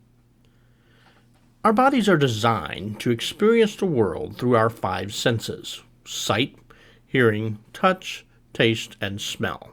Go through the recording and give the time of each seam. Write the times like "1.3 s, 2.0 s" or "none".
none